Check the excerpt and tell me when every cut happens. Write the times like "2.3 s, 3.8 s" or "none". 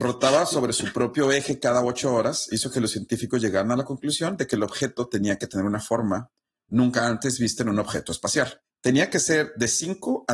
none